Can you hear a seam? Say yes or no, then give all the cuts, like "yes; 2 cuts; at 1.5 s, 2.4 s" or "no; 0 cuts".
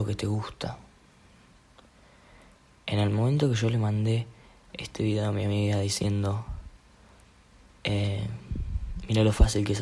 no; 0 cuts